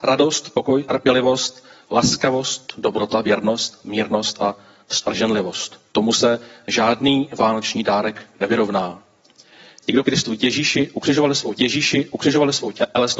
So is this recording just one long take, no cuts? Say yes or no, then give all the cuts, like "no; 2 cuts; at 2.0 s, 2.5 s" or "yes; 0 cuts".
no; 2 cuts; at 10.0 s, 11.5 s